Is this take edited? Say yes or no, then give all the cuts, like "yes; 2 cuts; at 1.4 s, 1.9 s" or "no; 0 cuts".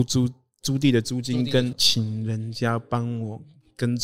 yes; 1 cut; at 1.7 s